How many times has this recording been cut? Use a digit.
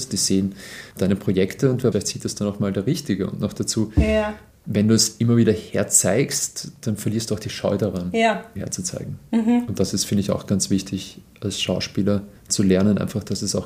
4